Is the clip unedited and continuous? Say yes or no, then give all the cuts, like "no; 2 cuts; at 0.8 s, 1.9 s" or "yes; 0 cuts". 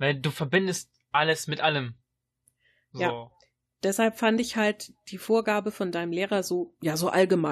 yes; 0 cuts